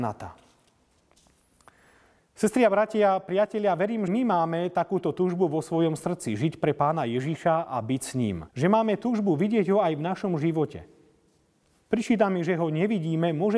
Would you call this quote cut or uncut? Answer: cut